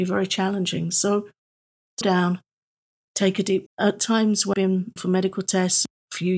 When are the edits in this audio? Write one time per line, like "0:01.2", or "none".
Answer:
0:02.0
0:03.7
0:04.5
0:05.0